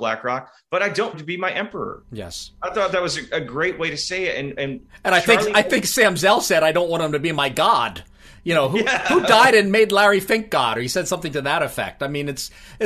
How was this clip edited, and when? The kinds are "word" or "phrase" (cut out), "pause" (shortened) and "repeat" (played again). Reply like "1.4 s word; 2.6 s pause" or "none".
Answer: 1.1 s word; 3.3 s word